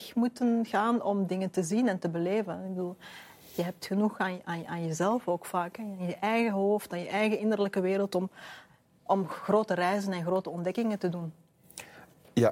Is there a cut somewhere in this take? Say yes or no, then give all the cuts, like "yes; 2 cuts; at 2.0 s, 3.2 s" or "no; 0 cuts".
no; 0 cuts